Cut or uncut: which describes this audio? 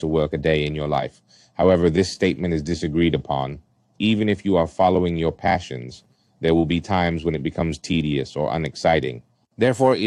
uncut